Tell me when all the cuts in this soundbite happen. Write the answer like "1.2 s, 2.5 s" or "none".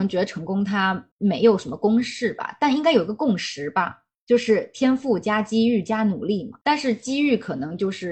1.1 s, 6.6 s